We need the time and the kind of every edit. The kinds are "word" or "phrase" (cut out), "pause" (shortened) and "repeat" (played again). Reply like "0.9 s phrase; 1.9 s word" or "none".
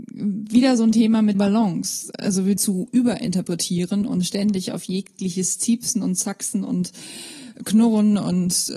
1.3 s word; 2.6 s phrase